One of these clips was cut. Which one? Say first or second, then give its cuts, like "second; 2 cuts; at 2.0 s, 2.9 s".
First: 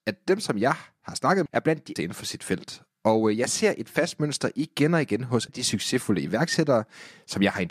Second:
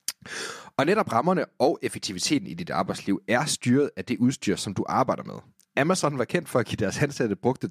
first; 3 cuts; at 1.5 s, 2.0 s, 5.5 s